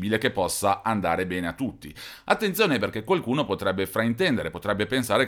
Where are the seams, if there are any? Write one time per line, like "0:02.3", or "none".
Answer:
none